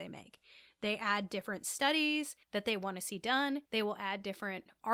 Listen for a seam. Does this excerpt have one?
yes; 2 cuts; at 2.4 s, 3.7 s

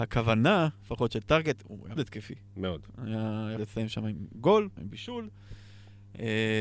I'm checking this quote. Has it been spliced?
yes; 3 cuts; at 2.0 s, 3.6 s, 4.8 s

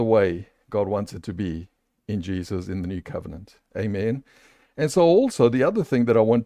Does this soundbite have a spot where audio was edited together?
no; 0 cuts

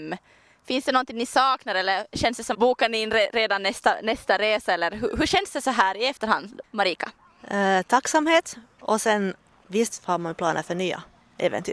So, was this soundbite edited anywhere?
yes; 1 cut; at 2.5 s

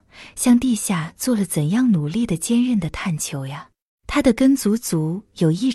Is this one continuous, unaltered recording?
no; 1 cut; at 3.9 s

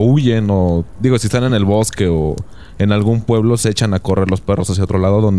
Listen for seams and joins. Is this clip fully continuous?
yes; 0 cuts

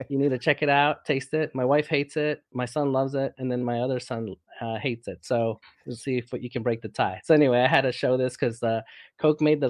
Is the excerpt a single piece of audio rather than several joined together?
yes; 0 cuts

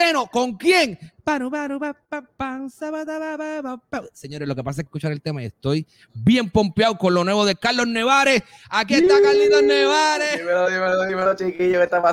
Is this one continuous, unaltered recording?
no; 1 cut; at 4.9 s

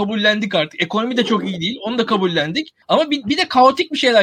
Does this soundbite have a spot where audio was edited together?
yes; 1 cut; at 2.8 s

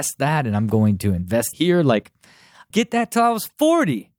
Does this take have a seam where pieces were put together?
yes; 2 cuts; at 1.5 s, 2.7 s

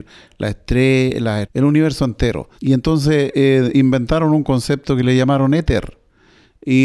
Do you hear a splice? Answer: yes; 2 cuts; at 1.4 s, 2.5 s

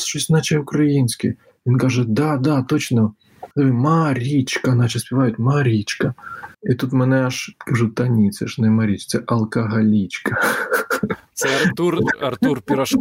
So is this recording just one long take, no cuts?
no; 3 cuts; at 3.5 s, 6.5 s, 7.5 s

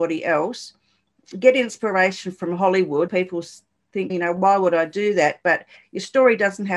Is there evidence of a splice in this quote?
yes; 2 cuts; at 3.1 s, 4.1 s

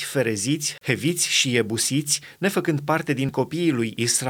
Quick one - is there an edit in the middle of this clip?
no; 0 cuts

